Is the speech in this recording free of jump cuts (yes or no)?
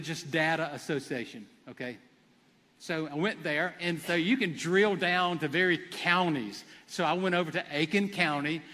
yes